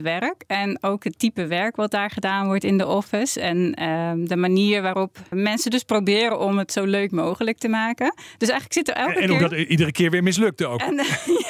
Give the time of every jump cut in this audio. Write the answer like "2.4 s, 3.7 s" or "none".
5.3 s

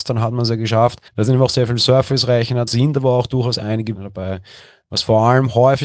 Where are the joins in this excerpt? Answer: 1.1 s, 2.7 s, 4.0 s

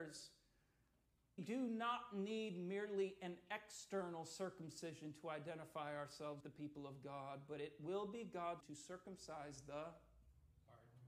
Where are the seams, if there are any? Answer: 1.4 s, 6.4 s, 8.6 s

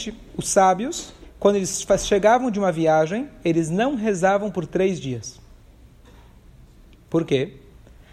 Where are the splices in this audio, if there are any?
1.2 s

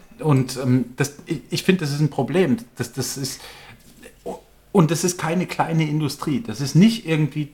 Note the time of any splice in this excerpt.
none

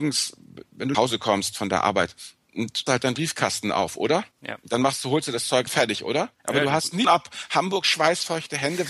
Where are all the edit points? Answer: 0.9 s, 2.9 s, 4.3 s, 5.7 s, 6.3 s, 7.0 s

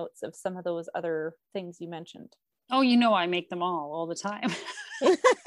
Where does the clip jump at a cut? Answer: none

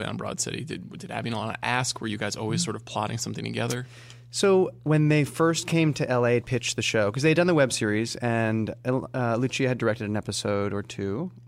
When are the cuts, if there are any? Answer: 6.4 s

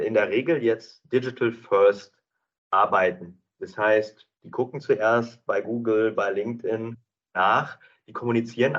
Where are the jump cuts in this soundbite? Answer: none

